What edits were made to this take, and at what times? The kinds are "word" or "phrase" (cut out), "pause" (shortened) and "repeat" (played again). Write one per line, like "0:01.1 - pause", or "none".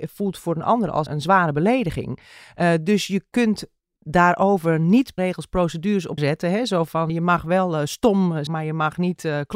0:01.1 - word
0:04.0 - word
0:05.2 - word
0:06.2 - word
0:07.1 - word
0:08.5 - word